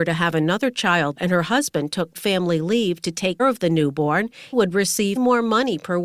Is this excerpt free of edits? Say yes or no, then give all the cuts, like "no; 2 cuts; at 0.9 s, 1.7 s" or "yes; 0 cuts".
no; 5 cuts; at 1.2 s, 2.1 s, 3.4 s, 4.5 s, 5.2 s